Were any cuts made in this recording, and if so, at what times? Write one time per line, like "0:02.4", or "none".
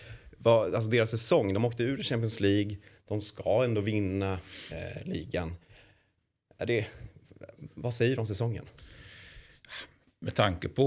none